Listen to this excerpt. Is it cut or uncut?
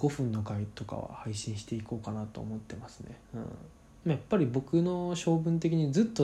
cut